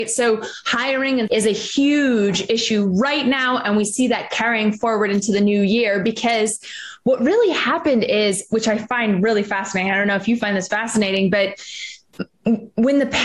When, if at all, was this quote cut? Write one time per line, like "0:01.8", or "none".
0:01.3

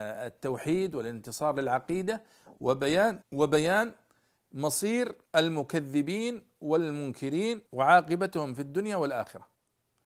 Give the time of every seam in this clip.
0:03.2
0:05.2
0:07.7

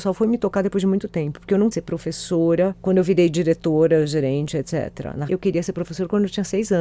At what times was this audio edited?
0:01.7
0:05.3

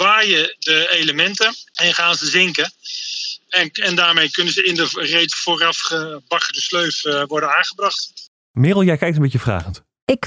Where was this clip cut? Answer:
none

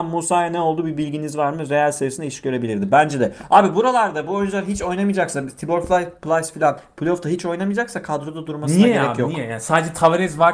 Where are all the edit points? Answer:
none

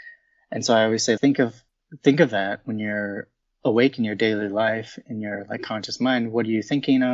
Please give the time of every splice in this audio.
0:01.2

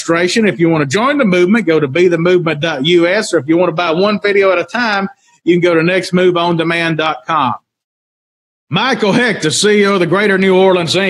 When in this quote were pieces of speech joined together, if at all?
none

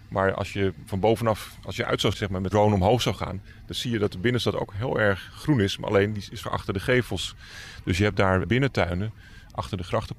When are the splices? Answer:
0:02.1
0:02.5
0:06.4

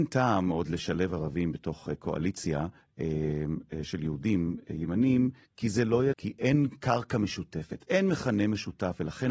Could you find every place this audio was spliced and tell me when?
0:02.8
0:05.4
0:06.1

